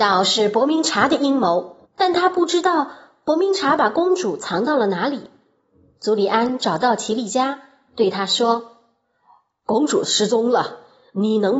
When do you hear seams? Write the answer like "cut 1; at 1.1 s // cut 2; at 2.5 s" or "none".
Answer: cut 1; at 1.9 s

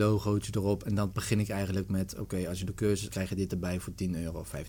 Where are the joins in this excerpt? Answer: cut 1; at 3.1 s

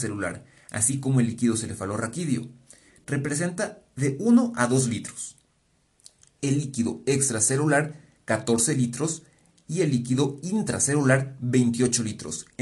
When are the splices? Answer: none

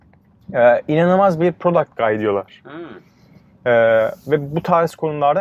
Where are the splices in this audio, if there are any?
none

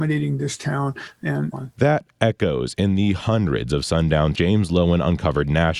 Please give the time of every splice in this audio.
cut 1; at 1.5 s // cut 2; at 4.3 s

